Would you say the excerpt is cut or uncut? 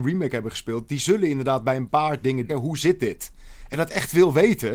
cut